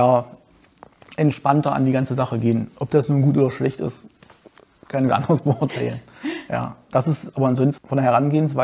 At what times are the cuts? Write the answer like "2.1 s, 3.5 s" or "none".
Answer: none

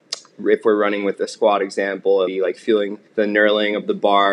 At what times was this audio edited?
2.2 s, 3.1 s

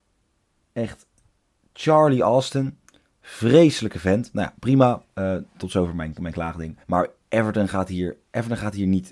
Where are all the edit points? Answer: 6.8 s

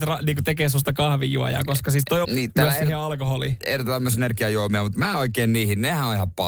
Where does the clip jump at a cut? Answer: 2.2 s, 4.2 s

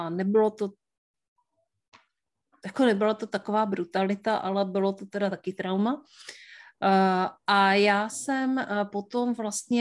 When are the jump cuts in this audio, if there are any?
none

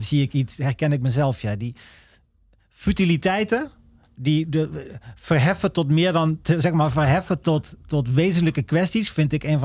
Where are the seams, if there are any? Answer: none

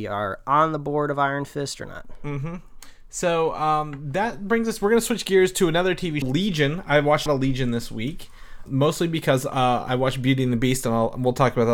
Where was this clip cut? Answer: 6.2 s, 7.3 s, 8.7 s

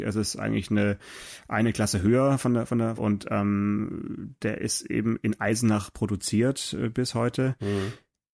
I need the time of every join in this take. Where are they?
3.0 s

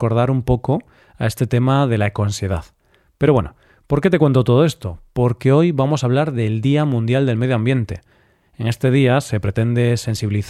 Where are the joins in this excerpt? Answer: none

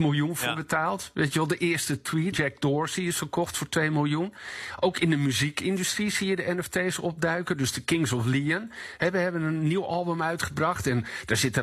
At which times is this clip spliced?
2.3 s

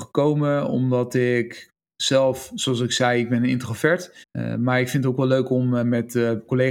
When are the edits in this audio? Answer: 4.2 s

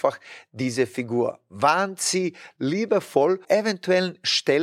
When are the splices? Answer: 3.4 s

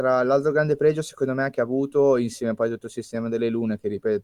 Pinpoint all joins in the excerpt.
none

